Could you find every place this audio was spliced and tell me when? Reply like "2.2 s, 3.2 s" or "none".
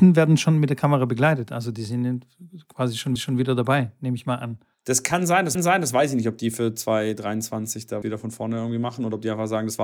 3.2 s, 4.7 s, 5.5 s, 8.0 s